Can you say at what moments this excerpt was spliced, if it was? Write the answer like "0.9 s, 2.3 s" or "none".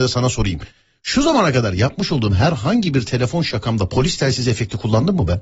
none